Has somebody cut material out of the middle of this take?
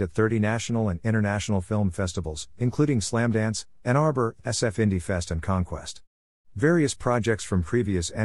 no; 0 cuts

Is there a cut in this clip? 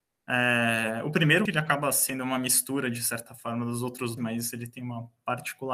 yes; 2 cuts; at 1.5 s, 4.2 s

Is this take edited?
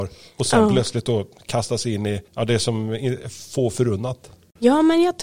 yes; 1 cut; at 2.3 s

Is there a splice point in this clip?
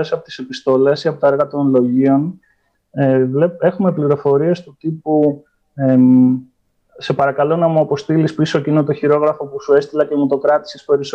no; 0 cuts

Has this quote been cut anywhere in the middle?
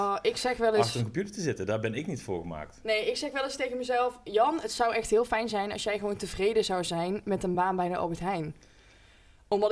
no; 0 cuts

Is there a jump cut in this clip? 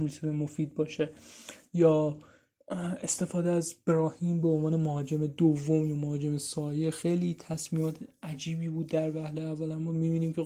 no; 0 cuts

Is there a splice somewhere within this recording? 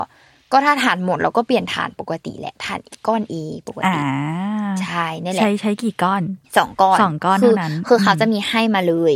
yes; 2 cuts; at 3.3 s, 6.4 s

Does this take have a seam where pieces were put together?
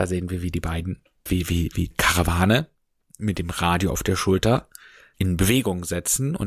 yes; 3 cuts; at 1.3 s, 1.9 s, 5.1 s

